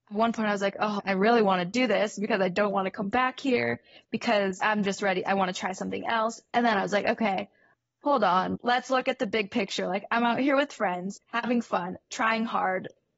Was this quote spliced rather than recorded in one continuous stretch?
yes; 1 cut; at 11.2 s

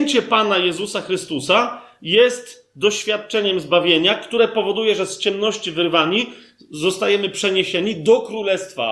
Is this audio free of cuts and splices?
yes; 0 cuts

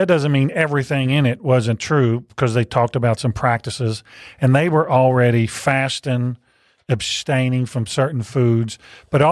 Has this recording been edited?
no; 0 cuts

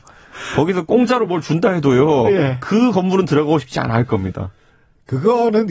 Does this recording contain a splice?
no; 0 cuts

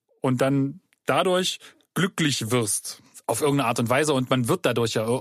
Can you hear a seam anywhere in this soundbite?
no; 0 cuts

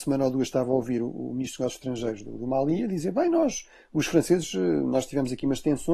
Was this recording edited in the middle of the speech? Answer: no; 0 cuts

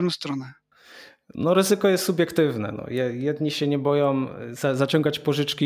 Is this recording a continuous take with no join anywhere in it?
yes; 0 cuts

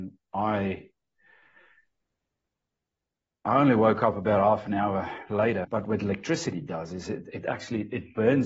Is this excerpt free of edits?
yes; 0 cuts

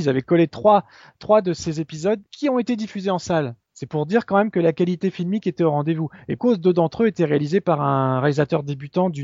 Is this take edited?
yes; 3 cuts; at 2.3 s, 3.6 s, 6.4 s

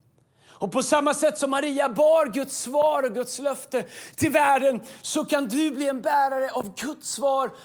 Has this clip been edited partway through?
no; 0 cuts

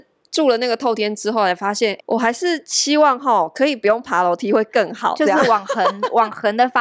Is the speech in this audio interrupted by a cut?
yes; 1 cut; at 2.0 s

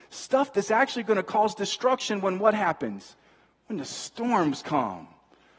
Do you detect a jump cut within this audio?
no; 0 cuts

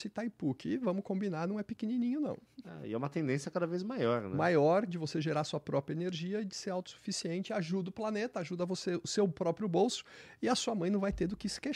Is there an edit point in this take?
no; 0 cuts

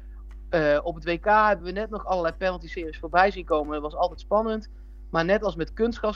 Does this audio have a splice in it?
no; 0 cuts

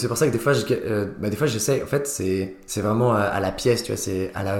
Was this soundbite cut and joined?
no; 0 cuts

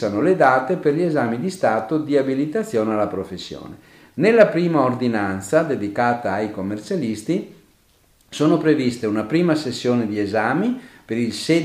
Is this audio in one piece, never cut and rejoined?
yes; 0 cuts

